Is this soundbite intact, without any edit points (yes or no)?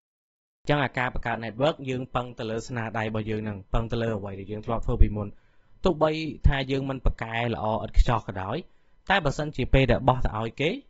yes